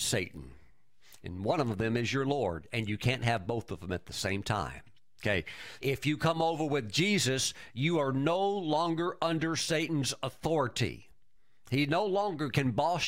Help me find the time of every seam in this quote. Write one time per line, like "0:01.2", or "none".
0:05.8